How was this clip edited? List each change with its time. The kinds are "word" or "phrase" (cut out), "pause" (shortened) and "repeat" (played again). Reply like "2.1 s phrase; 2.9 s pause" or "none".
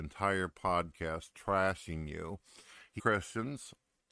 3.0 s word